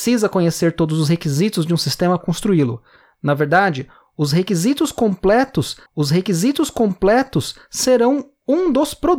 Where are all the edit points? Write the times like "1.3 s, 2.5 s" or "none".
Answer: 2.2 s, 5.9 s